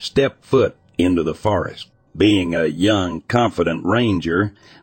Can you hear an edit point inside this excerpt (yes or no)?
yes